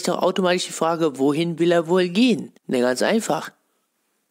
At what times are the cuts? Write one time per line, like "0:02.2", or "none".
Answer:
0:02.6